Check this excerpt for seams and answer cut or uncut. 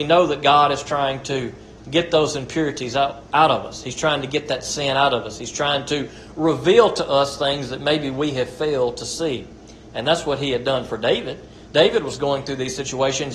uncut